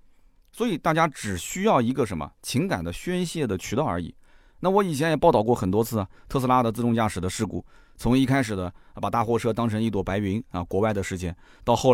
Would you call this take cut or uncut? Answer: uncut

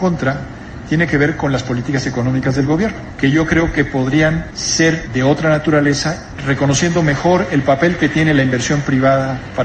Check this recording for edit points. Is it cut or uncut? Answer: uncut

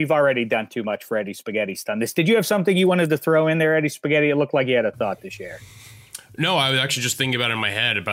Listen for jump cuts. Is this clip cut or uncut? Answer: cut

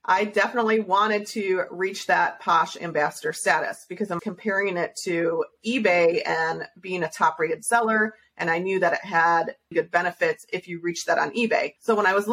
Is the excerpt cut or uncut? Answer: cut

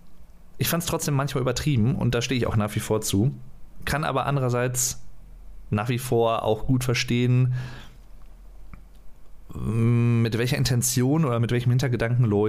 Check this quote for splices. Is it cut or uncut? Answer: uncut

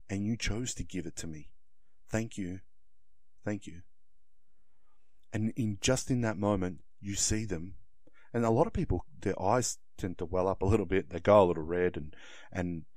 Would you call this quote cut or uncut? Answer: uncut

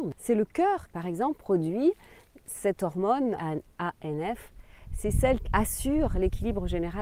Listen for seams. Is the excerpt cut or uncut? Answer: cut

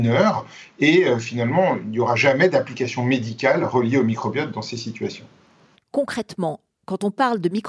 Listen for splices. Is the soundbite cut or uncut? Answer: uncut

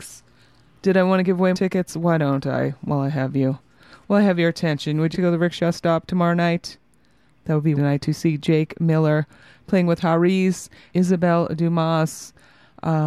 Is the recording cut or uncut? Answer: cut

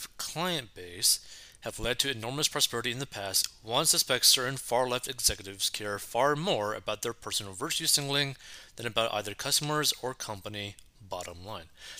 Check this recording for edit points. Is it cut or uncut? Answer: uncut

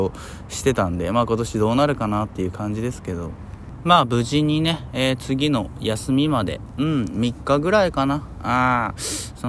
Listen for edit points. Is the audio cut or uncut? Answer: uncut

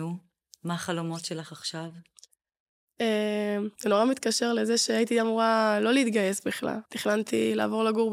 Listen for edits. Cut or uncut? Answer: cut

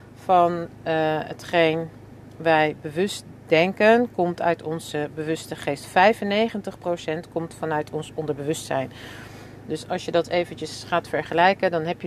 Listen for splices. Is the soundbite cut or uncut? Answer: uncut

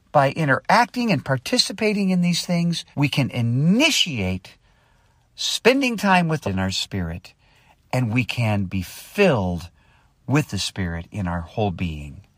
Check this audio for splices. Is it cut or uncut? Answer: cut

